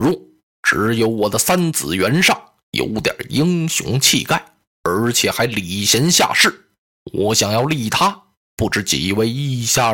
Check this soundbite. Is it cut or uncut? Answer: uncut